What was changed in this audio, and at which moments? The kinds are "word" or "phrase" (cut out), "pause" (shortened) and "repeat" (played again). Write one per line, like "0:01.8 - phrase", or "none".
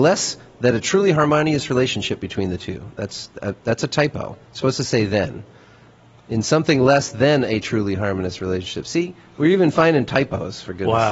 0:04.4 - pause